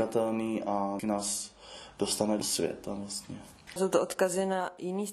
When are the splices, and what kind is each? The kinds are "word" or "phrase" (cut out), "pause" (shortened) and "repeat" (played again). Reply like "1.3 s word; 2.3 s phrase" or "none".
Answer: 1.0 s word; 2.4 s word

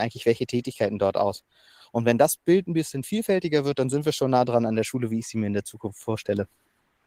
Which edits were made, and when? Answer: none

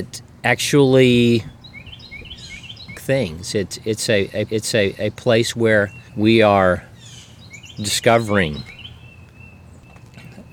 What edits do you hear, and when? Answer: 2.9 s phrase; 4.5 s repeat; 6.1 s pause

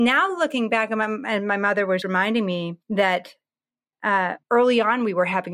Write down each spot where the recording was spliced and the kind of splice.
2.0 s word; 2.8 s pause; 4.4 s pause

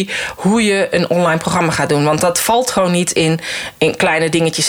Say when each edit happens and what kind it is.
none

